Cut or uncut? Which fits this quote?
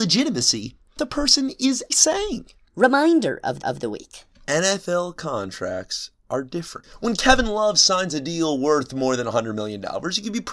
cut